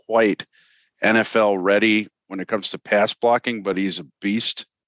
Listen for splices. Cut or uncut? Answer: uncut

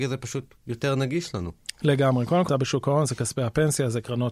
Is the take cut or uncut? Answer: cut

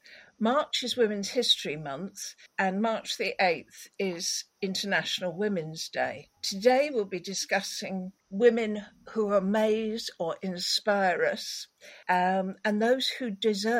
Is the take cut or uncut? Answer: cut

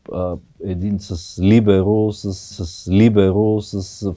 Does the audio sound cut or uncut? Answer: cut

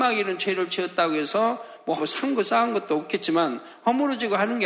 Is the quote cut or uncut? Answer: cut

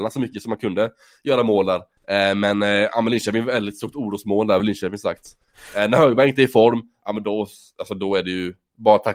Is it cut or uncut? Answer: uncut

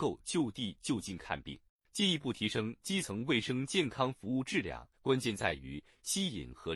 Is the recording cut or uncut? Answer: cut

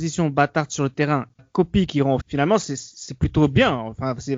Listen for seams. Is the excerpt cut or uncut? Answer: cut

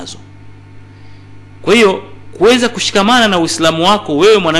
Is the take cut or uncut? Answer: uncut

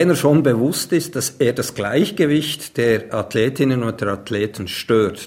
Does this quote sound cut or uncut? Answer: uncut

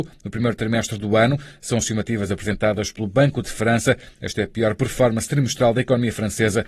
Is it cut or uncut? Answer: uncut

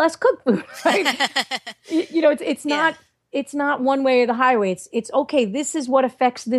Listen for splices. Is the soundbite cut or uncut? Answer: uncut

